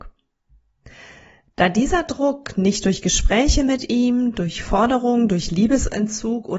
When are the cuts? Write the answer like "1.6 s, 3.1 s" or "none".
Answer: none